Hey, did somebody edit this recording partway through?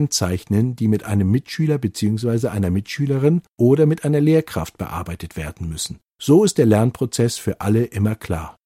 no; 0 cuts

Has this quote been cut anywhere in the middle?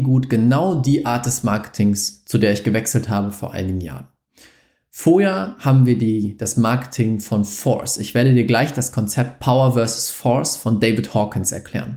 no; 0 cuts

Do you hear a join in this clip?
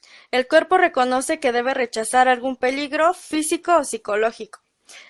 no; 0 cuts

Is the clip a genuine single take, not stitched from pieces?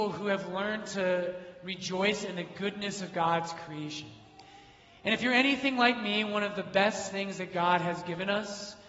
yes; 0 cuts

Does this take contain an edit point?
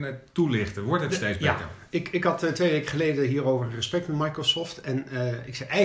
no; 0 cuts

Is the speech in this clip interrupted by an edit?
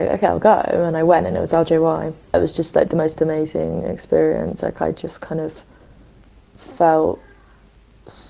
yes; 1 cut; at 2.2 s

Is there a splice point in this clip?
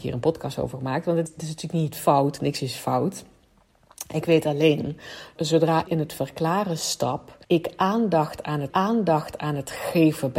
yes; 5 cuts; at 1.3 s, 5.4 s, 5.9 s, 7.4 s, 8.7 s

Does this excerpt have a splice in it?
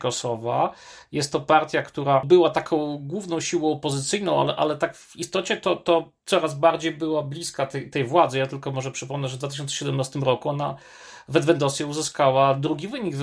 no; 0 cuts

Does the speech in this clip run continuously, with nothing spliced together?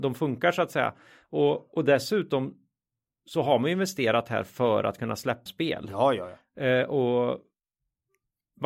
no; 1 cut; at 5.5 s

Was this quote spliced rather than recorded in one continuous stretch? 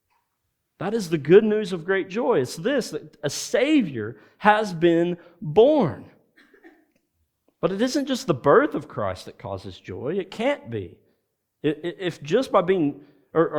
no; 0 cuts

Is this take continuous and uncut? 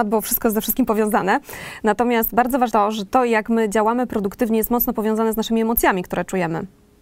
no; 1 cut; at 2.7 s

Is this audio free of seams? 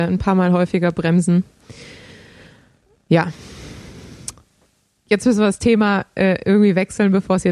yes; 0 cuts

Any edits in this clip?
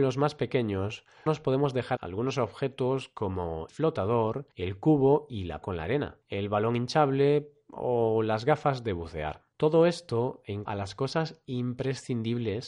yes; 8 cuts; at 1.3 s, 2.0 s, 3.7 s, 4.5 s, 5.6 s, 6.2 s, 9.5 s, 10.7 s

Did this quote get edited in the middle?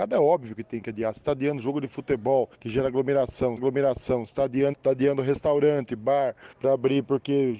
yes; 4 cuts; at 2.5 s, 3.6 s, 4.7 s, 6.5 s

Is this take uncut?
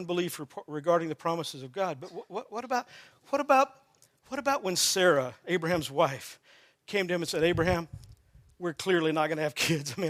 yes; 0 cuts

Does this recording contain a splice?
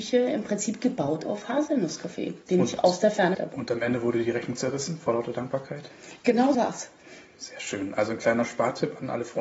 yes; 2 cuts; at 3.3 s, 6.5 s

